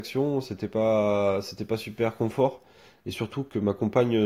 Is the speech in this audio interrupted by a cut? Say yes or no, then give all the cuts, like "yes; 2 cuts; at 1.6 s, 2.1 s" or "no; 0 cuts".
no; 0 cuts